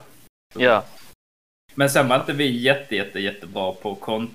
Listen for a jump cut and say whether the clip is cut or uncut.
uncut